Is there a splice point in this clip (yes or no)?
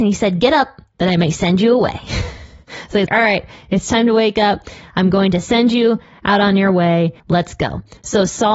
yes